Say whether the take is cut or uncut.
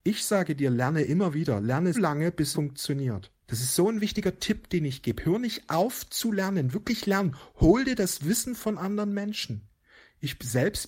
cut